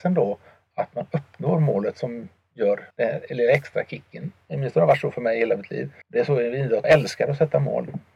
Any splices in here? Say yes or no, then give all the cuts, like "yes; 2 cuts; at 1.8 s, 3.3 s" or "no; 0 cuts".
yes; 3 cuts; at 2.9 s, 6.0 s, 6.8 s